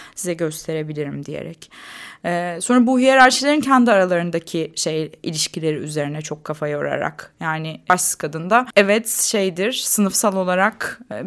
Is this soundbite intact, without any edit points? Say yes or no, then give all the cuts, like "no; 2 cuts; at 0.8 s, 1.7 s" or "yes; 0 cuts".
yes; 0 cuts